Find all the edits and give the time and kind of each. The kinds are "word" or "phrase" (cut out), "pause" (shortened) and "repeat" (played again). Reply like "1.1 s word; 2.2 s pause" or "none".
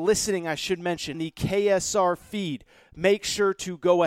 1.1 s word